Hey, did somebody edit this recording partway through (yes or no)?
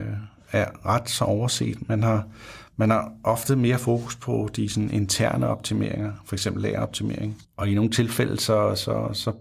no